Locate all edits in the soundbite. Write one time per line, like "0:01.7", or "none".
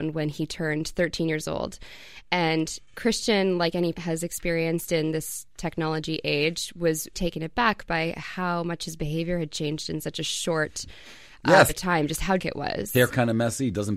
0:03.9
0:07.1
0:11.7
0:12.4